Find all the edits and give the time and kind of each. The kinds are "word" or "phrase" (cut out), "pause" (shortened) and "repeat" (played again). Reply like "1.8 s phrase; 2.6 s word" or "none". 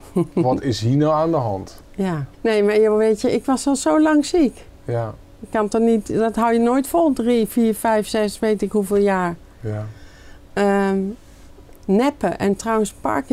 2.3 s pause; 11.7 s word